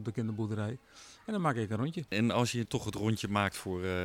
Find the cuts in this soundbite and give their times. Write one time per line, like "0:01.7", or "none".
0:02.7